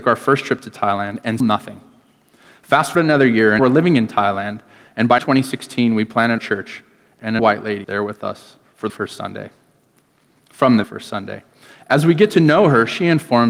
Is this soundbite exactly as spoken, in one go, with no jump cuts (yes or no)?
no